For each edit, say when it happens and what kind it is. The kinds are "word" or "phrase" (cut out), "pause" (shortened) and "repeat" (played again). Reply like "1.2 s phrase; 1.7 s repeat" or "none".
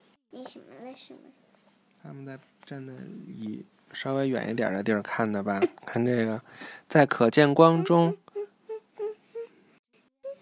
5.8 s pause